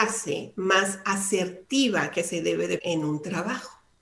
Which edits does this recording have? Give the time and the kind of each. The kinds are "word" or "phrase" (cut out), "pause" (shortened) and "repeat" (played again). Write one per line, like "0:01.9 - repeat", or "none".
0:02.8 - word